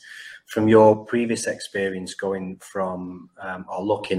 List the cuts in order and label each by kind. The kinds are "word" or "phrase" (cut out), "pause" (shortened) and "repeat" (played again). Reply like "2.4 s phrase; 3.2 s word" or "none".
none